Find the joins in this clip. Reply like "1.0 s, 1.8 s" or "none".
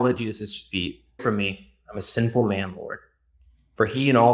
1.2 s